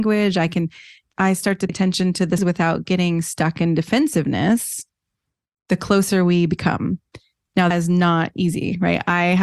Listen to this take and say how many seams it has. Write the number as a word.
four